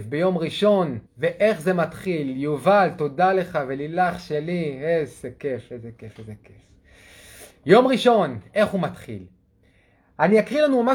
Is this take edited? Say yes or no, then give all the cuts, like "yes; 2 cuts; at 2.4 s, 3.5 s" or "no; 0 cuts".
yes; 1 cut; at 1.1 s